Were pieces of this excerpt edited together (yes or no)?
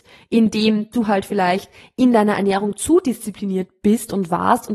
yes